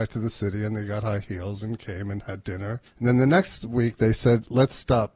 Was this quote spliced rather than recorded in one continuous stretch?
yes; 1 cut; at 2.9 s

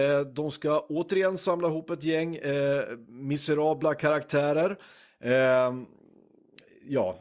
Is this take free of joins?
yes; 0 cuts

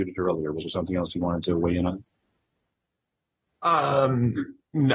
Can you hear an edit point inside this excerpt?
no; 0 cuts

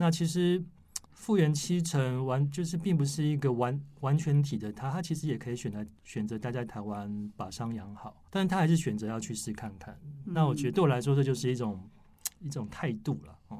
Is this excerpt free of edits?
no; 4 cuts; at 1.0 s, 6.0 s, 8.3 s, 12.4 s

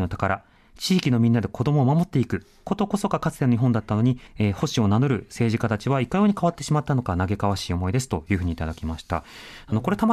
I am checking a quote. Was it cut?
yes; 1 cut; at 4.3 s

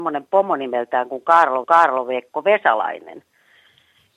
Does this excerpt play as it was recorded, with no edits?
no; 1 cut; at 1.6 s

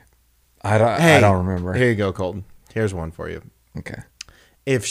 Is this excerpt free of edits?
yes; 0 cuts

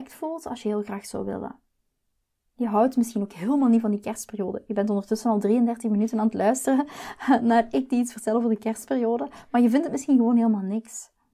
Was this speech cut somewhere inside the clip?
no; 0 cuts

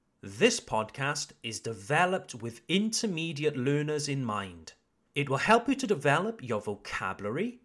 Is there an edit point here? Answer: no; 0 cuts

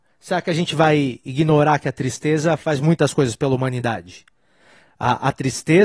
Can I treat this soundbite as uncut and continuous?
yes; 0 cuts

